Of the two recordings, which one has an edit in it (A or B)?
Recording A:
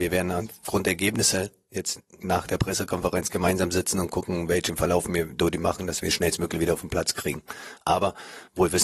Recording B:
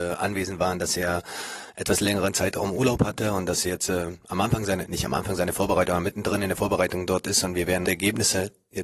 B